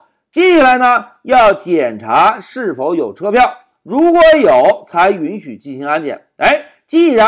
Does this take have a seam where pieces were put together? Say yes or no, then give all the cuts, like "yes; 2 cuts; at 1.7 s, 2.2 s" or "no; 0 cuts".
no; 0 cuts